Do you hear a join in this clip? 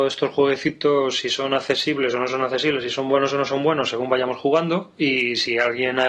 no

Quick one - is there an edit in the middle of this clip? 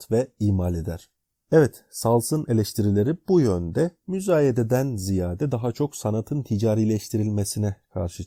no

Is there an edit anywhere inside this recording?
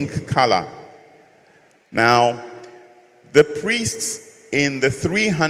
no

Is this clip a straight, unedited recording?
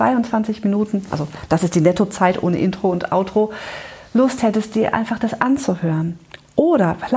yes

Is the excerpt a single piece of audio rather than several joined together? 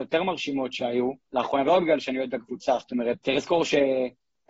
no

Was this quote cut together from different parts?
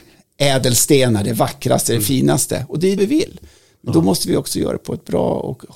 yes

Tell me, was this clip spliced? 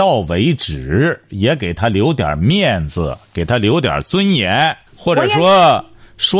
yes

